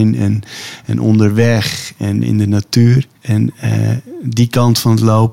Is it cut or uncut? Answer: cut